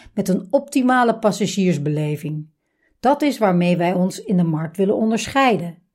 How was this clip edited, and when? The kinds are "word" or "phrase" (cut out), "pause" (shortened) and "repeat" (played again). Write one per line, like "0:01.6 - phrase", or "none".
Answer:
none